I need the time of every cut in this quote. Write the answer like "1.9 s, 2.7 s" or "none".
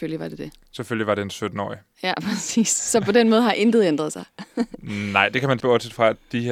5.6 s